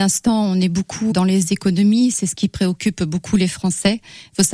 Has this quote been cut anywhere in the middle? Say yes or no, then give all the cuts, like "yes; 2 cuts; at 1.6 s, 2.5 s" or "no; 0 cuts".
yes; 1 cut; at 1.1 s